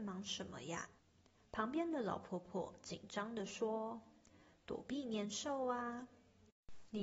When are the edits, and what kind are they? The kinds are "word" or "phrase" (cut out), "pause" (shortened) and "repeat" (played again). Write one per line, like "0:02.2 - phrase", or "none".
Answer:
0:01.0 - pause